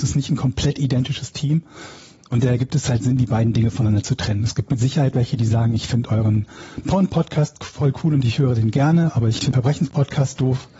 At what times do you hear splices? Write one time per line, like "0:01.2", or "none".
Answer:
0:09.5